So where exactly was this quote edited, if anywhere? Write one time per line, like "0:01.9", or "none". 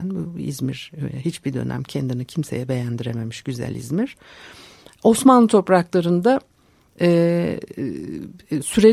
none